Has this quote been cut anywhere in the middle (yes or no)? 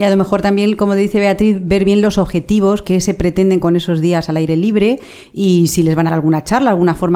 yes